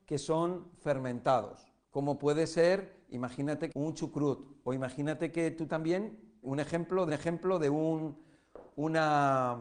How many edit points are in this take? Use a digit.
5